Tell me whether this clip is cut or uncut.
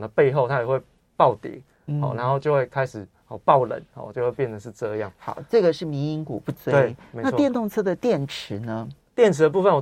uncut